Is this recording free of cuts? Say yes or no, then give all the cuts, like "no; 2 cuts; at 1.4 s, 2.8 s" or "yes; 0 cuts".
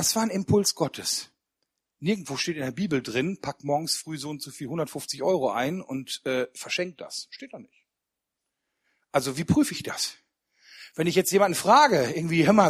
yes; 0 cuts